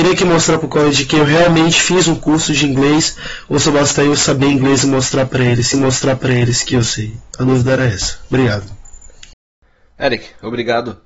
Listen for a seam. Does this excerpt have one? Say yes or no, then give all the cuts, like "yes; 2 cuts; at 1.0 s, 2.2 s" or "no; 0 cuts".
yes; 1 cut; at 5.7 s